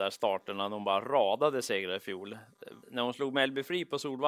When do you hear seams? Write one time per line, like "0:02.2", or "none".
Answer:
0:02.8